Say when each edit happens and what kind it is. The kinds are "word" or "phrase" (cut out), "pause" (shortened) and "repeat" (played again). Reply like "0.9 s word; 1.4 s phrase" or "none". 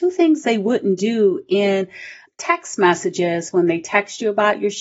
2.3 s word